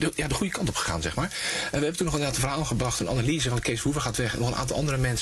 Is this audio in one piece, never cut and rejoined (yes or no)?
yes